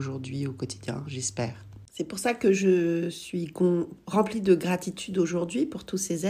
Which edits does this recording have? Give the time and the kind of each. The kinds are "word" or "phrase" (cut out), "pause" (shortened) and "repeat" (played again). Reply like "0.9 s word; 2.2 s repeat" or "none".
1.9 s pause

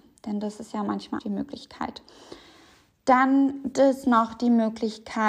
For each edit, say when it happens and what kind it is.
1.2 s word; 3.7 s word

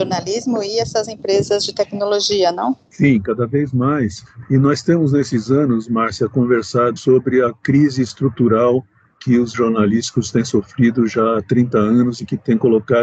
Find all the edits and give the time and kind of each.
7.0 s word; 9.5 s word

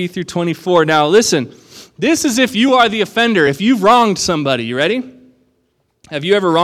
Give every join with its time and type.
none

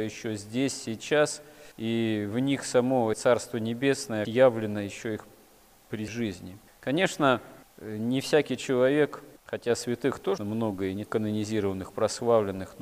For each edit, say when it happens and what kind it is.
1.7 s pause; 3.1 s word; 4.2 s word; 6.1 s word; 7.6 s pause; 9.4 s pause; 10.4 s word; 11.1 s word

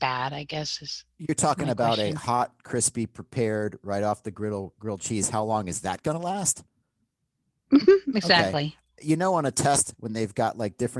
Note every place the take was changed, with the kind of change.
none

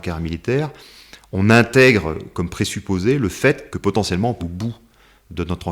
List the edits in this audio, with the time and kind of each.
2.3 s word; 3.7 s word; 4.4 s word

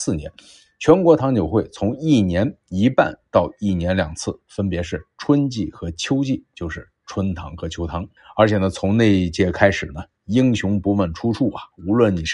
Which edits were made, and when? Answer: 8.2 s pause

